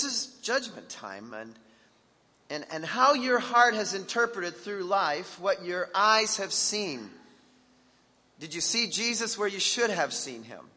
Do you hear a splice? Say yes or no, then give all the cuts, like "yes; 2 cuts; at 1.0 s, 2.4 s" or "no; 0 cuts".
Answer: no; 0 cuts